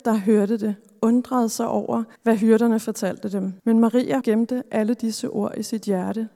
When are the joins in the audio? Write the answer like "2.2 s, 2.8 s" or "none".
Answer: 2.1 s, 3.6 s, 4.2 s